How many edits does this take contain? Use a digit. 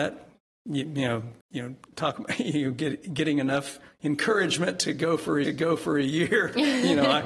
2